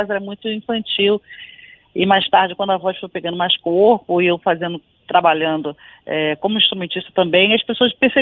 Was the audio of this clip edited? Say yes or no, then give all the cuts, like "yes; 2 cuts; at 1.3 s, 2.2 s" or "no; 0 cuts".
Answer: no; 0 cuts